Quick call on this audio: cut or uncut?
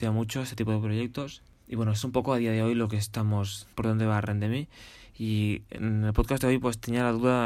cut